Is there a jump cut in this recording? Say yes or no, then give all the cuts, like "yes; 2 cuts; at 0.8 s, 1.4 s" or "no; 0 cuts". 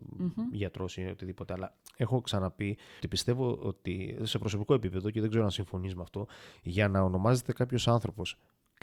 yes; 1 cut; at 3.0 s